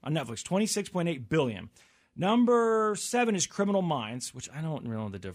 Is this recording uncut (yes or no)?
yes